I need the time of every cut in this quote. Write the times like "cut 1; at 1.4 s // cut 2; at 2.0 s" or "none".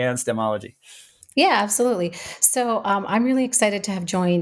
none